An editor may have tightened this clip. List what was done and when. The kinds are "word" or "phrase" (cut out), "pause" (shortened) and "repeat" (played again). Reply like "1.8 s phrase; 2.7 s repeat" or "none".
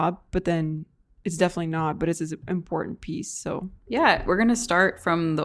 none